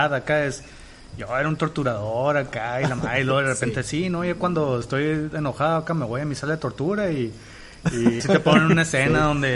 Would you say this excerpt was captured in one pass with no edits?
no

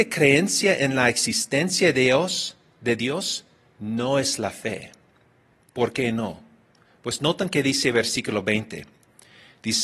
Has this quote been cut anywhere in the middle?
no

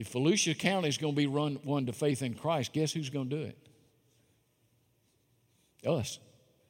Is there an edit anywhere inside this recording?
no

